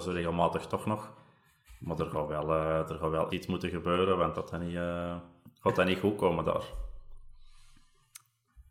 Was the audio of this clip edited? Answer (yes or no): yes